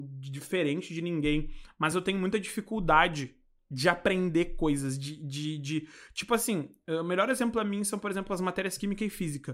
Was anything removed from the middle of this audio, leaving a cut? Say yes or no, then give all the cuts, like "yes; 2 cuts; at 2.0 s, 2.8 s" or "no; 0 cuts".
no; 0 cuts